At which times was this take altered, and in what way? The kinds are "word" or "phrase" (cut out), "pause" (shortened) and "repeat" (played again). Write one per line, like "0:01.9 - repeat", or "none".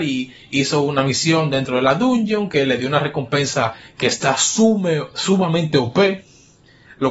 none

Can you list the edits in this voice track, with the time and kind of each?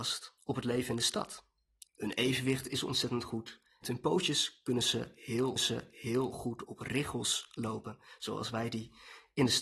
0:03.8 - phrase
0:05.6 - repeat

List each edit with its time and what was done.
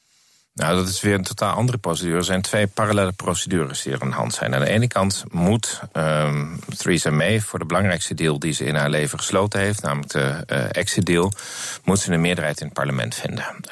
none

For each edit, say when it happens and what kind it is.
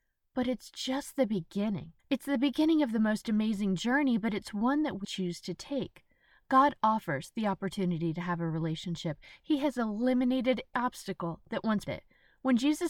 0:02.0 - pause
0:05.0 - word
0:10.7 - word
0:11.9 - word

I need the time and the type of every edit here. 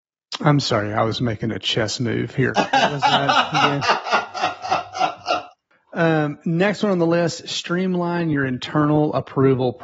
none

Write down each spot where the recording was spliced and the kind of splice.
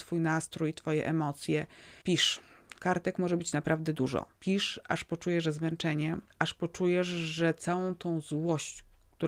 0:02.0 - pause
0:04.3 - pause
0:06.3 - pause

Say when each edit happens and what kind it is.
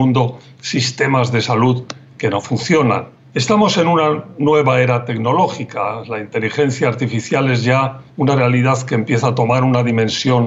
0:08.1 - pause

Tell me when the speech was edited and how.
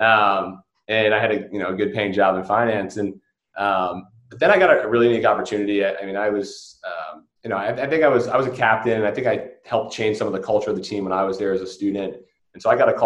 0:04.2 - pause
0:07.4 - pause

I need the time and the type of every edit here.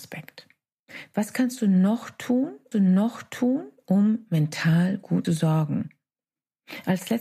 0:02.7 - repeat
0:05.2 - phrase

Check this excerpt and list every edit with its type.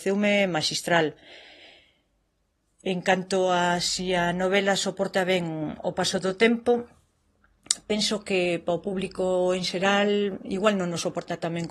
none

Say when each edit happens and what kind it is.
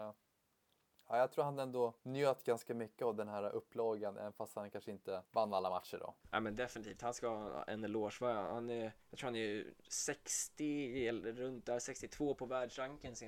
0:02.0 - pause
0:05.2 - pause
0:06.2 - pause
0:09.0 - pause

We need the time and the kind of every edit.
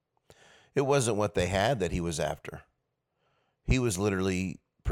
none

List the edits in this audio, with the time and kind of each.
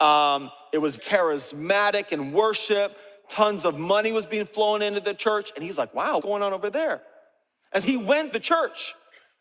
0:01.0 - word
0:06.2 - word
0:07.8 - word
0:08.3 - word

